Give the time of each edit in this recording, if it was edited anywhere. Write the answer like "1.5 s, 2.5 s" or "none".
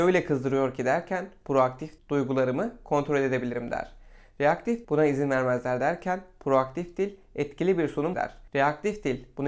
2.0 s, 4.8 s, 8.1 s